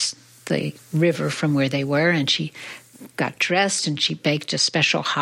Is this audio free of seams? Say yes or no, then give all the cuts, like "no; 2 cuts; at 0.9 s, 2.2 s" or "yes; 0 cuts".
yes; 0 cuts